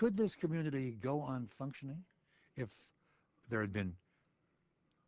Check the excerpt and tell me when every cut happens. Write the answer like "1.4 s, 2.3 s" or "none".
none